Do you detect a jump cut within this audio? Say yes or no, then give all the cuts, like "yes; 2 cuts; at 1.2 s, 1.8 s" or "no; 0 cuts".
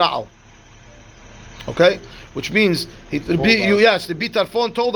no; 0 cuts